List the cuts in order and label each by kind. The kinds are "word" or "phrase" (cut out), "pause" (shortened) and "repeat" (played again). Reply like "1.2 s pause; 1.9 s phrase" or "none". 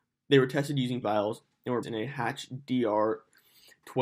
1.0 s word; 1.8 s word